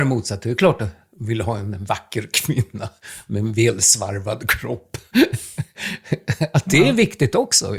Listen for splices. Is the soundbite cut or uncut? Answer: uncut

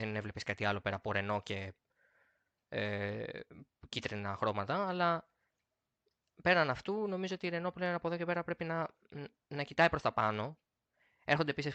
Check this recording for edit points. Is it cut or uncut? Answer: uncut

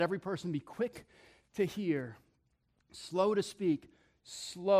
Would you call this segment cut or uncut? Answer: uncut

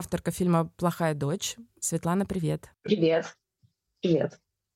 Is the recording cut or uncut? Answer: cut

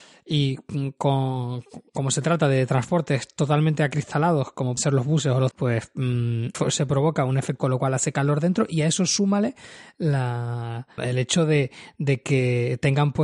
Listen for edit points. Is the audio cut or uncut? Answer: cut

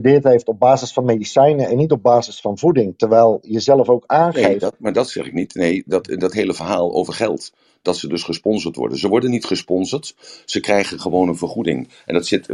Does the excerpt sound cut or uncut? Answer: uncut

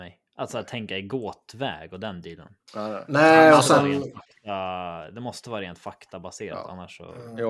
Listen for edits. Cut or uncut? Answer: uncut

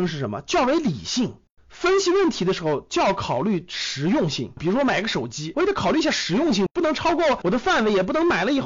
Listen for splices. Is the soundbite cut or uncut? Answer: cut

